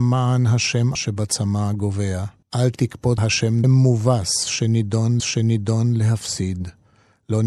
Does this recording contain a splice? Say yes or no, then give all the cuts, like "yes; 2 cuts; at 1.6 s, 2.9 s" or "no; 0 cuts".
yes; 5 cuts; at 0.9 s, 2.4 s, 3.2 s, 3.6 s, 5.2 s